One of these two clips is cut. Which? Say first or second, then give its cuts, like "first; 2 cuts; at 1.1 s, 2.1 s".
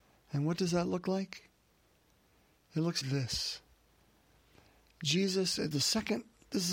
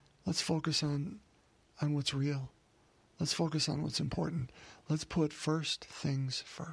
first; 2 cuts; at 3.0 s, 5.7 s